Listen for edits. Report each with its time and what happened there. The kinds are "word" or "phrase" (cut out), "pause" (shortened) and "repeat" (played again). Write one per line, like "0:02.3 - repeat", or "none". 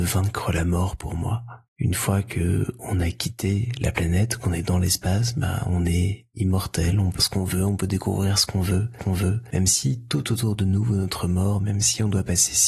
0:01.6 - pause
0:06.3 - pause
0:07.2 - word
0:09.0 - repeat